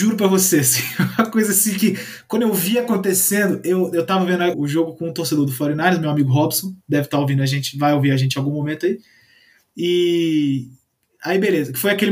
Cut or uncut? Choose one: cut